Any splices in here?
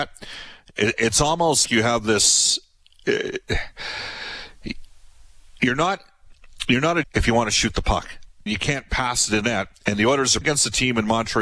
yes; 5 cuts; at 1.7 s, 7.0 s, 8.5 s, 9.4 s, 10.4 s

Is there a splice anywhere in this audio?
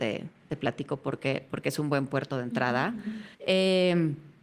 yes; 1 cut; at 3.3 s

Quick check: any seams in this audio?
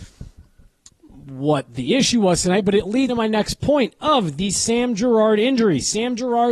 yes; 1 cut; at 3.1 s

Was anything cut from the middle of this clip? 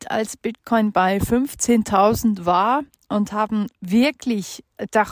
no; 0 cuts

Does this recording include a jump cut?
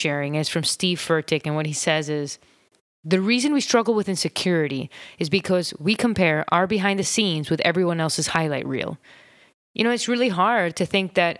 no; 0 cuts

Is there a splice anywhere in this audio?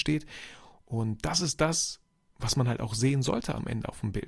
no; 0 cuts

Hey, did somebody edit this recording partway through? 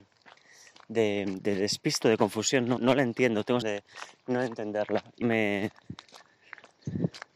yes; 5 cuts; at 1.4 s, 2.0 s, 2.8 s, 3.6 s, 5.2 s

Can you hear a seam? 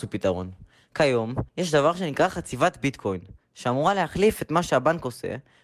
yes; 1 cut; at 1.5 s

